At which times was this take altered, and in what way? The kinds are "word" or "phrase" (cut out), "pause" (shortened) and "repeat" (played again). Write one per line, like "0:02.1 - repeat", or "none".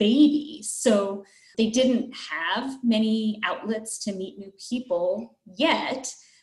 none